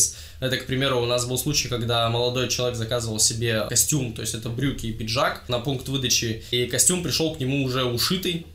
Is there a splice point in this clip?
no; 0 cuts

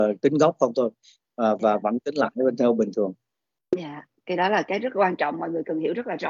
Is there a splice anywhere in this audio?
no; 0 cuts

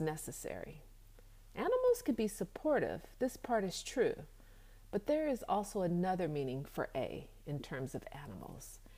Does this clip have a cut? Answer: no; 0 cuts

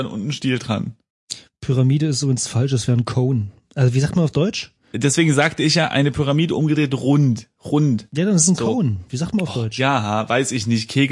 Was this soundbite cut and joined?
no; 0 cuts

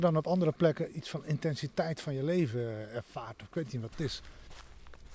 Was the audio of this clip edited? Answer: no; 0 cuts

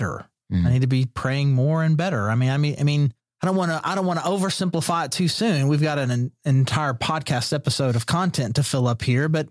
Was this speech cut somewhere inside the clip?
no; 0 cuts

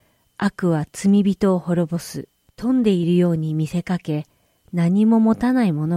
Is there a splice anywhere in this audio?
yes; 1 cut; at 2.4 s

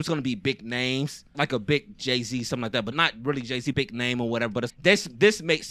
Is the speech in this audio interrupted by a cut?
yes; 4 cuts; at 1.3 s, 2.9 s, 3.7 s, 4.7 s

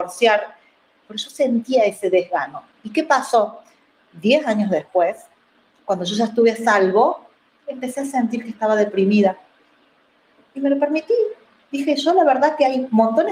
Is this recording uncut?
yes; 0 cuts

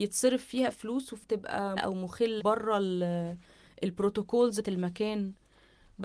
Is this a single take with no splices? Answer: no; 4 cuts; at 1.2 s, 1.8 s, 2.4 s, 4.6 s

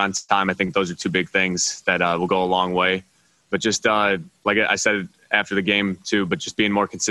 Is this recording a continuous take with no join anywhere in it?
yes; 0 cuts

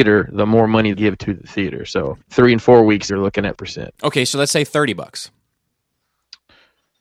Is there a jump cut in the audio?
yes; 4 cuts; at 0.9 s, 2.2 s, 3.1 s, 3.5 s

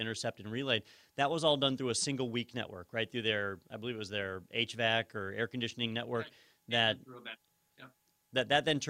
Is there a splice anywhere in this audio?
no; 0 cuts

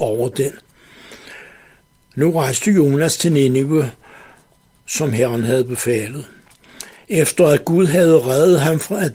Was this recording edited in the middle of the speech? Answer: no; 0 cuts

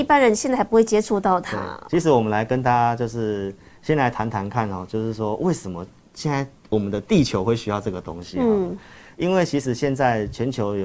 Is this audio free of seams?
yes; 0 cuts

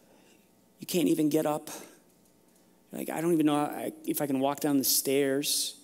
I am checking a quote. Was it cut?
no; 0 cuts

